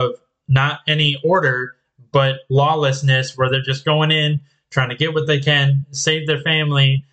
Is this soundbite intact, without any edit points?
yes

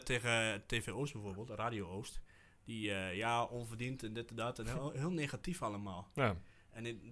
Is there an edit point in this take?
no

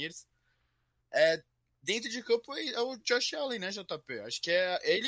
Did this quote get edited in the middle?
no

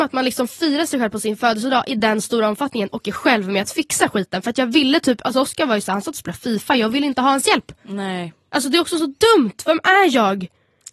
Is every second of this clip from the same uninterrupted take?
yes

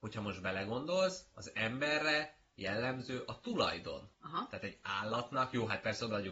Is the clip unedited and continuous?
yes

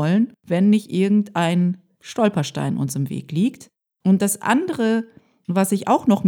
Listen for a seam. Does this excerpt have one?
no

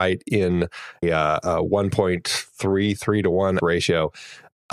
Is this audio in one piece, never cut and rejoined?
no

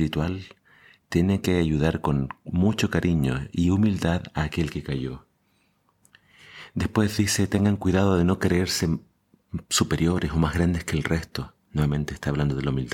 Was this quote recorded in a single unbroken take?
no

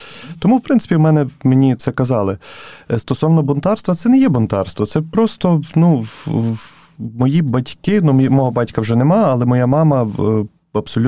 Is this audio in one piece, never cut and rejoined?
yes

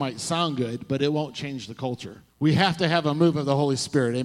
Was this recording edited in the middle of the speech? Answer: yes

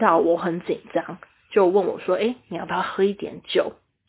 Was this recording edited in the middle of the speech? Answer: no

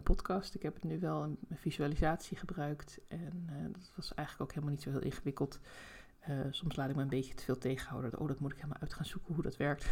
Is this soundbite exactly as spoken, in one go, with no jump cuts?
yes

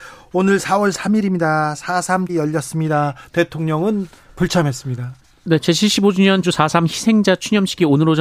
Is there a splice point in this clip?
yes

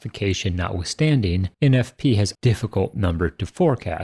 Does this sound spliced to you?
yes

